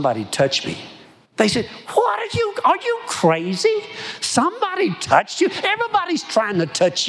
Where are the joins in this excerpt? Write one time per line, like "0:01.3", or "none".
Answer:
0:01.0